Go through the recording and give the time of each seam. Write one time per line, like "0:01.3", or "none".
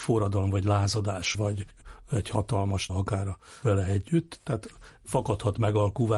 0:01.3
0:02.9
0:03.6